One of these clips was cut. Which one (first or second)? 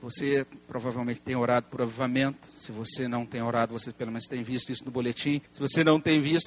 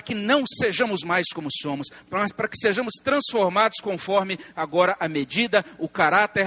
first